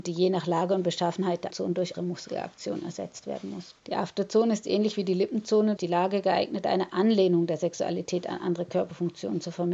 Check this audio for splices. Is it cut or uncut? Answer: cut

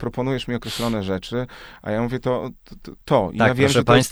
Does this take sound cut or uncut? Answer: cut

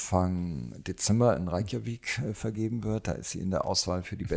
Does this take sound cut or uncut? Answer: uncut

